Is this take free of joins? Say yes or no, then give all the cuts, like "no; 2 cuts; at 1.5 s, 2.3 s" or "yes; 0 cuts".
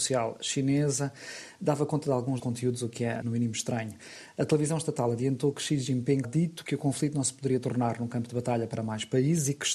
no; 3 cuts; at 2.4 s, 3.2 s, 6.2 s